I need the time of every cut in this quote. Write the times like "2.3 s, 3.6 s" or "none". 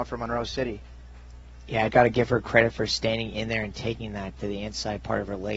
1.9 s, 4.4 s